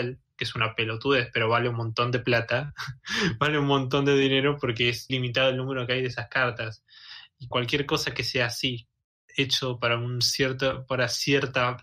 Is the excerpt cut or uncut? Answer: cut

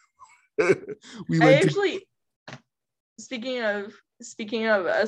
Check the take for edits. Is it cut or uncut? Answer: uncut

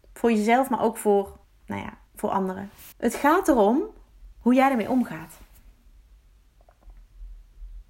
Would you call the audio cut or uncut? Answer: cut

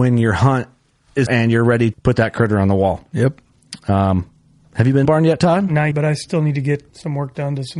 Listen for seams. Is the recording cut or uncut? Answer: cut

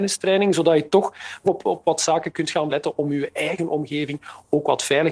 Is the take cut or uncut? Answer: cut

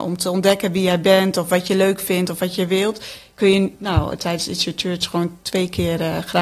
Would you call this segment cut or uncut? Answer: uncut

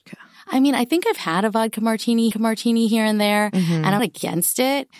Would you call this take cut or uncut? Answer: cut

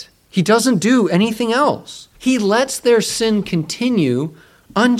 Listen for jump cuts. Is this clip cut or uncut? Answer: cut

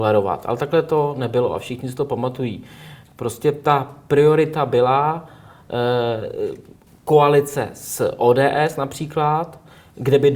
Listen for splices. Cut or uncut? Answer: cut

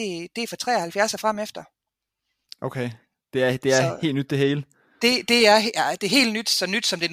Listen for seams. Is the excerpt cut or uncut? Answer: uncut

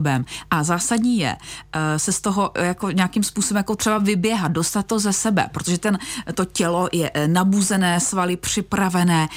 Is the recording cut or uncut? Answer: uncut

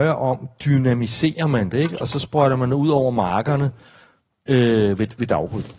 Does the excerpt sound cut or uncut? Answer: uncut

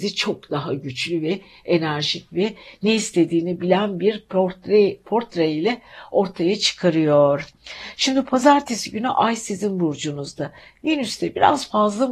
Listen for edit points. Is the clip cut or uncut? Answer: uncut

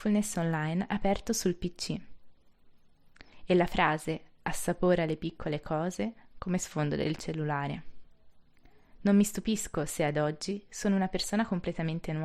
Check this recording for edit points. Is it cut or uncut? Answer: uncut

